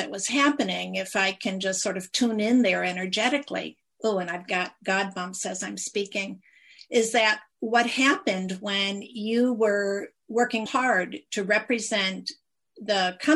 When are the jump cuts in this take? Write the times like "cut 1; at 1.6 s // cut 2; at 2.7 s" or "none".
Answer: cut 1; at 10.7 s